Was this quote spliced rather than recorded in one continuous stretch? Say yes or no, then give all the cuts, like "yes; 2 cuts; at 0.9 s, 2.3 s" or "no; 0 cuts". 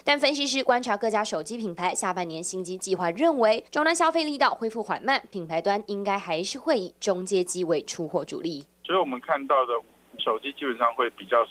yes; 2 cuts; at 3.7 s, 10.2 s